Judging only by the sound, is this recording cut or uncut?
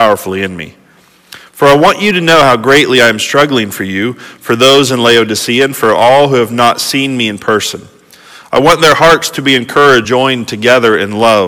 cut